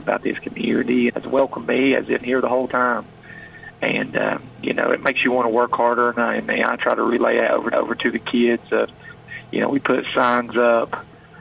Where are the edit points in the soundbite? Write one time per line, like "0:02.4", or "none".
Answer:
0:01.1
0:02.2
0:07.7